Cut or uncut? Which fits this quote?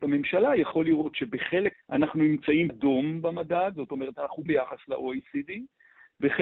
cut